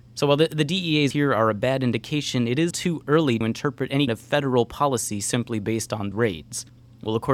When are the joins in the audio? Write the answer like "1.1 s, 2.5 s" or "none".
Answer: 1.1 s, 2.7 s, 3.4 s, 4.1 s, 6.1 s